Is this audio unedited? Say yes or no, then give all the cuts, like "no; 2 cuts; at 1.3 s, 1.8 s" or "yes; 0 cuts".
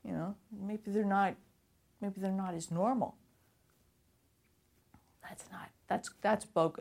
yes; 0 cuts